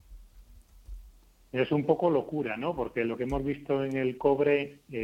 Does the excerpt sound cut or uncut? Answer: uncut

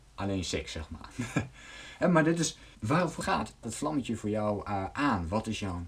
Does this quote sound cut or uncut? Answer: cut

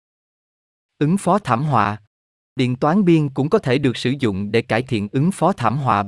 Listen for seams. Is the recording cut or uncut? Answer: uncut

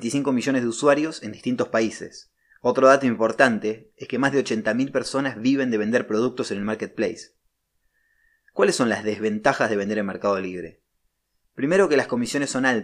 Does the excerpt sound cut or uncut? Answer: uncut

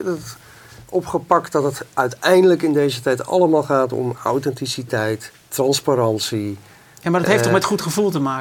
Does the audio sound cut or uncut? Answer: uncut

